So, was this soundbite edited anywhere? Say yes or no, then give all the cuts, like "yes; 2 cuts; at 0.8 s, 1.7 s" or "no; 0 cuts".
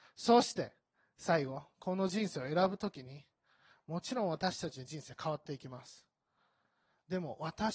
no; 0 cuts